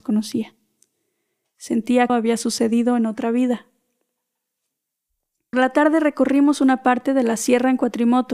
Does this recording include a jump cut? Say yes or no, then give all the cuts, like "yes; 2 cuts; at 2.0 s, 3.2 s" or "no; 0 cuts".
yes; 2 cuts; at 2.1 s, 5.5 s